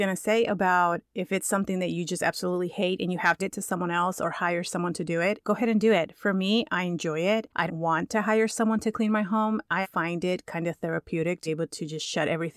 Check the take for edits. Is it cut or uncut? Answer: cut